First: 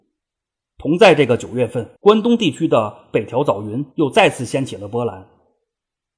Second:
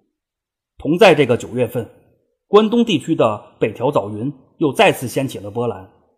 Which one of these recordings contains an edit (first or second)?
first